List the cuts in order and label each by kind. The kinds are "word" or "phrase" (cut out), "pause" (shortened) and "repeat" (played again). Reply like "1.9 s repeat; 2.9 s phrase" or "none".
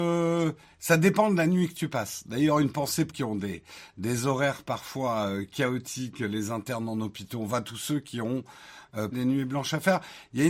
3.1 s phrase; 9.1 s word

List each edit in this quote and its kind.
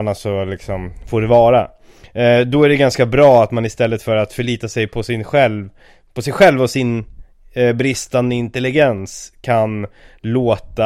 none

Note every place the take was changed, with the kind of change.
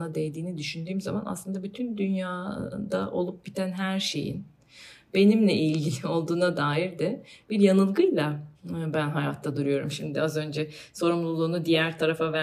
8.5 s pause

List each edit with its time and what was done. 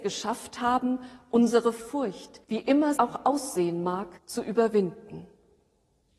2.4 s pause; 3.0 s word; 4.2 s pause

